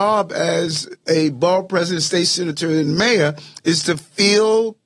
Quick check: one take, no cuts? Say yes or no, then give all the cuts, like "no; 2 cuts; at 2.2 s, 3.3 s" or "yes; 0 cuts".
yes; 0 cuts